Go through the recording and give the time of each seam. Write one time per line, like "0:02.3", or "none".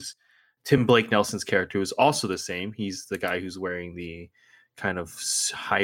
none